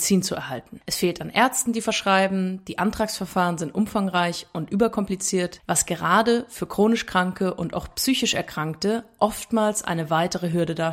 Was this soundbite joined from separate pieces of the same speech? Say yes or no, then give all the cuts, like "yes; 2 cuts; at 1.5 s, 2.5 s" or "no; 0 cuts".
no; 0 cuts